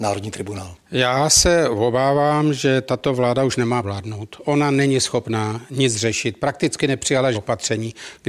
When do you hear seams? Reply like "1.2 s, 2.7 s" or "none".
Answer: 3.8 s, 7.3 s